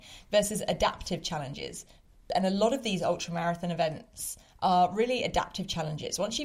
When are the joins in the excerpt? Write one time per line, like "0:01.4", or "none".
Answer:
none

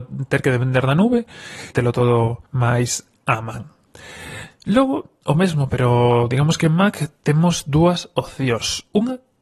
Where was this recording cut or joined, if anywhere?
0:01.7
0:02.5

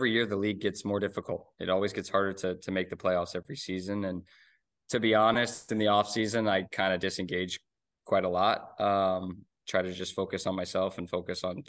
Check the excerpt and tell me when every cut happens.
none

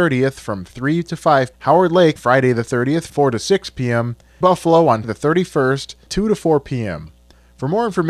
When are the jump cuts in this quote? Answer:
0:01.5
0:02.2
0:03.1
0:04.4
0:05.0
0:06.1

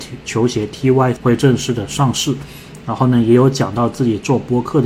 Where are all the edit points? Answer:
0:01.2

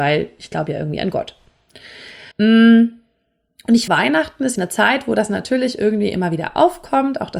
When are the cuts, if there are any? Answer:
0:02.3
0:03.9
0:04.6

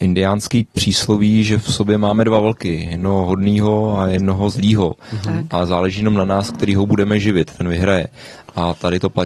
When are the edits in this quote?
none

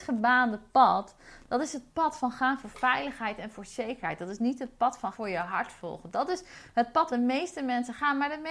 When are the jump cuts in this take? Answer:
0:05.1
0:07.1

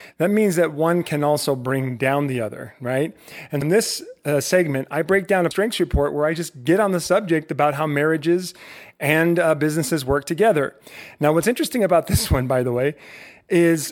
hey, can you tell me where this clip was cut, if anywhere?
0:03.6
0:05.5

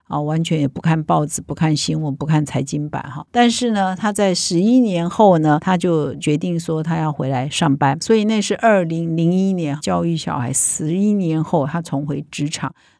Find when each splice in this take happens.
0:03.3

